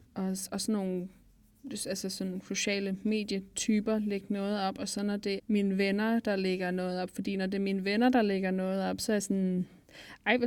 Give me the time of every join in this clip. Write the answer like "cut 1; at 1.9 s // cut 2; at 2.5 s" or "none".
cut 1; at 5.4 s